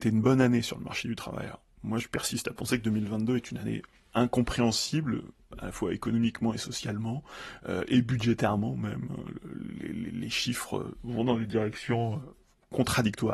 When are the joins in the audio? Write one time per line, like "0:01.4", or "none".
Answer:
none